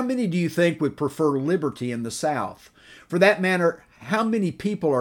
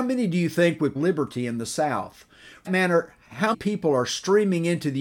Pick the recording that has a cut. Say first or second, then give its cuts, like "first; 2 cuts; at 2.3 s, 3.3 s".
second; 3 cuts; at 1.0 s, 2.7 s, 3.5 s